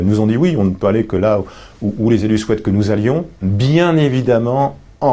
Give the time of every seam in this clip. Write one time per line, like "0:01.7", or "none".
none